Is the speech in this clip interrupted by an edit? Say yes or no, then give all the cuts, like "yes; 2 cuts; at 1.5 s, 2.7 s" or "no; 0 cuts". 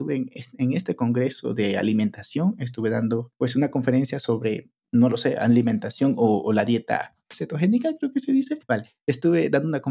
no; 0 cuts